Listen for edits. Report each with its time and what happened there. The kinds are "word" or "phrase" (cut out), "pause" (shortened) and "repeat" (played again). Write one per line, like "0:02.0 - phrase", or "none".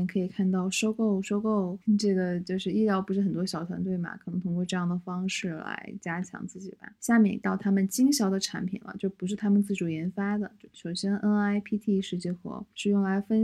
none